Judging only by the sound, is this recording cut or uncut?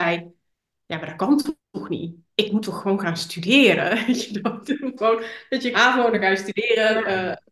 cut